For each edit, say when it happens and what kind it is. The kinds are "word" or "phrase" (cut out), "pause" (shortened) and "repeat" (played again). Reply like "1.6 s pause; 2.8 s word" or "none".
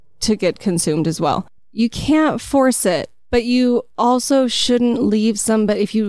1.6 s pause